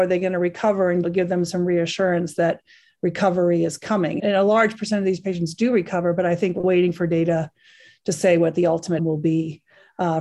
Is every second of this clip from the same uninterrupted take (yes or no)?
no